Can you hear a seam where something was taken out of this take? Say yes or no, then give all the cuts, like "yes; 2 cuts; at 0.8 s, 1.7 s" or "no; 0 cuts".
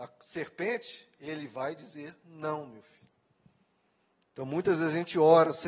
no; 0 cuts